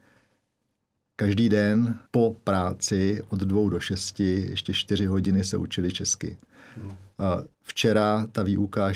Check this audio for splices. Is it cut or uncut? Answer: cut